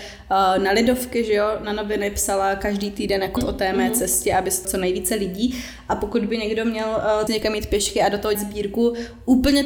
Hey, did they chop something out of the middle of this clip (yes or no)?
yes